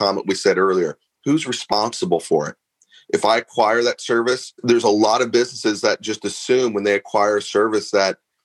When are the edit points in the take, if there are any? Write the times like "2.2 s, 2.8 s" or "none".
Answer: none